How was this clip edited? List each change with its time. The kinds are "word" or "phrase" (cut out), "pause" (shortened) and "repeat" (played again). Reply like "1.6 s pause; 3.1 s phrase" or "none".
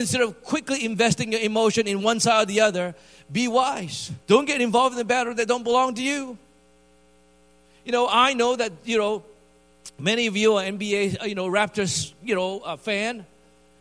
4.2 s pause

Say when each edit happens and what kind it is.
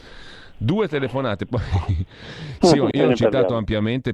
2.9 s word

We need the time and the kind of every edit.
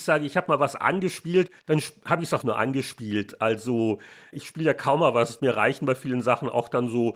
1.6 s pause; 2.4 s word; 4.3 s word; 5.4 s phrase

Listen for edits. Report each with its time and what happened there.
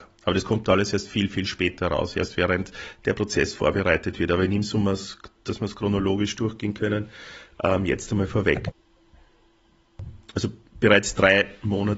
none

